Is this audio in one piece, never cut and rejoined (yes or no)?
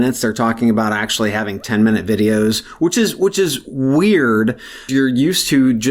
no